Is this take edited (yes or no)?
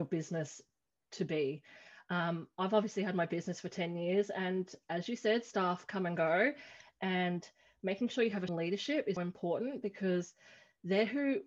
yes